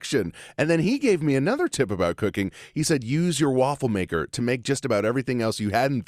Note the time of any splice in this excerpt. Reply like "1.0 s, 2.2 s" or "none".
none